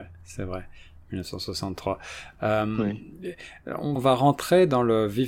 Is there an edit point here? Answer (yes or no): yes